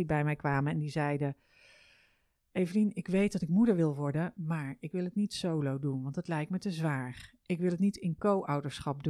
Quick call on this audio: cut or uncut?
uncut